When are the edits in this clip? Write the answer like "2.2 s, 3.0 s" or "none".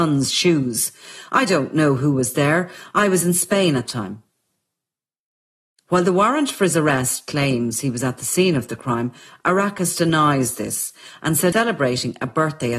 3.9 s, 11.5 s